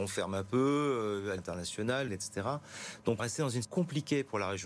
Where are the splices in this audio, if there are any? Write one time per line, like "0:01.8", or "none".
0:01.4
0:02.1
0:03.2
0:03.6